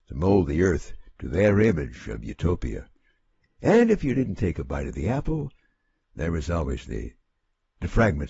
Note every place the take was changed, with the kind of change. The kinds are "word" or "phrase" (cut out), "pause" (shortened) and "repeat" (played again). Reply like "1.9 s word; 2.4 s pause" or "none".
none